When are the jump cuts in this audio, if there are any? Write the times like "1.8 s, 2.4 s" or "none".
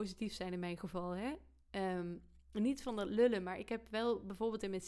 none

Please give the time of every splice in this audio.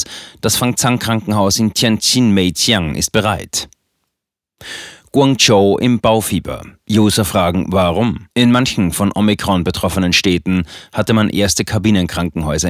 8.3 s

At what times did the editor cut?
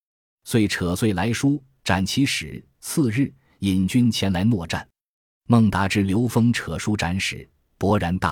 none

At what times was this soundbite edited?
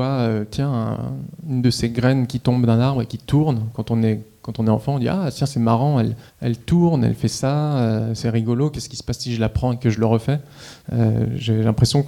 6.3 s, 10.8 s

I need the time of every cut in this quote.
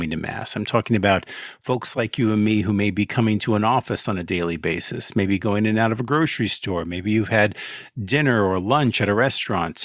none

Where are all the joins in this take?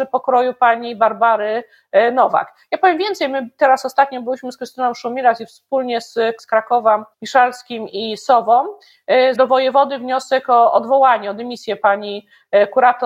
6.4 s, 7.1 s, 9.3 s

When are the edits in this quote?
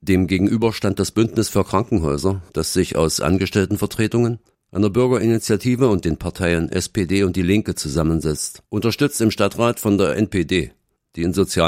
2.5 s, 4.5 s, 8.7 s

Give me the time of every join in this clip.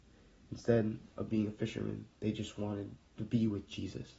2.1 s, 3.0 s

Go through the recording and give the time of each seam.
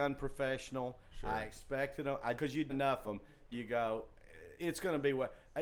2.4 s, 2.7 s, 3.0 s, 3.5 s, 4.6 s

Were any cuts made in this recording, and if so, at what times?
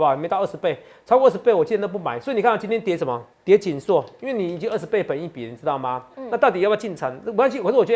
3.3 s

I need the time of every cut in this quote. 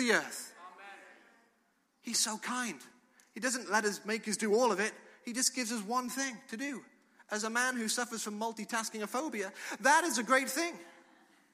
none

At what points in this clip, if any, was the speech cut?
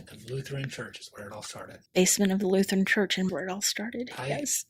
1.9 s, 3.3 s

